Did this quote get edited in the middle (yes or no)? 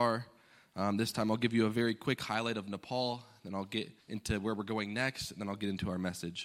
yes